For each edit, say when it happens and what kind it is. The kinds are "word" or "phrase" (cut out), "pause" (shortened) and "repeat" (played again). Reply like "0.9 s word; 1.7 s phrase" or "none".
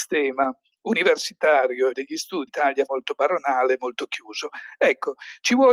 1.9 s phrase; 2.5 s word; 2.9 s word